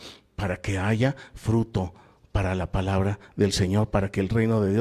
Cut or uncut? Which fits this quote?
uncut